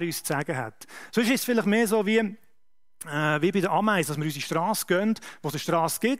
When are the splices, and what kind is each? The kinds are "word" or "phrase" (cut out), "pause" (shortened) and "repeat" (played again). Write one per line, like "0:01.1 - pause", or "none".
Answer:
none